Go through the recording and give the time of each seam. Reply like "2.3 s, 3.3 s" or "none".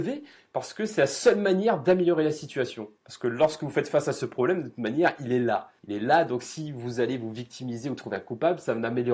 3.0 s, 5.8 s

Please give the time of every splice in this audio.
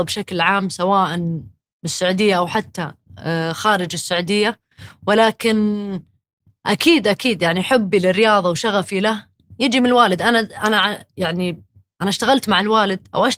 none

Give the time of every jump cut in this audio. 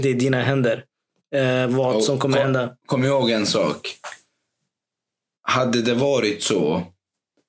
none

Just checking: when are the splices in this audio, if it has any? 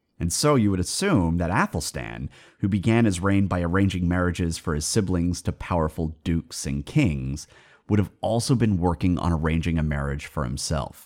none

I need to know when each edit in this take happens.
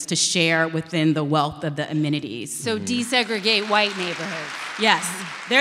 none

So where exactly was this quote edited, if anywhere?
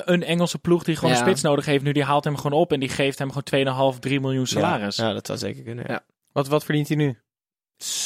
none

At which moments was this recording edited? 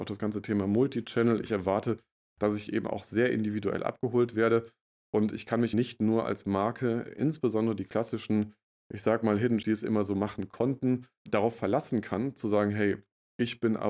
5.7 s, 9.6 s, 11.3 s

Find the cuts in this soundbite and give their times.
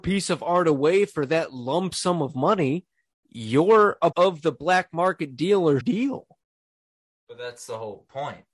4.1 s, 5.8 s

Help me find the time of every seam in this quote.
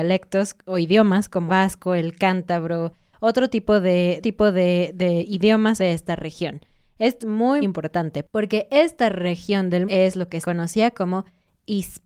1.5 s, 4.2 s, 5.8 s, 7.2 s, 7.6 s, 9.9 s, 10.4 s

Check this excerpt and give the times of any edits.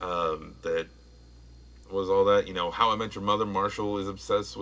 1.8 s

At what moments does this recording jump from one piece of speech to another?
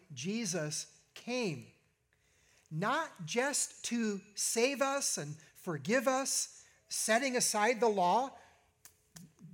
none

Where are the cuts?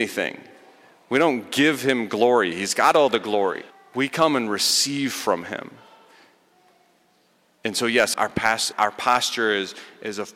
3.7 s, 8.1 s, 8.7 s

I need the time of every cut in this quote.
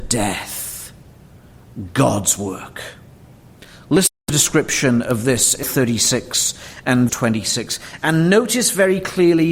4.2 s, 5.6 s, 7.1 s

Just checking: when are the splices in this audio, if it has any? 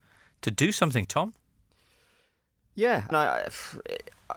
1.0 s, 3.1 s

